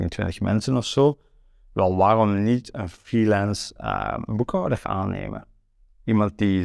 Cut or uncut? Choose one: uncut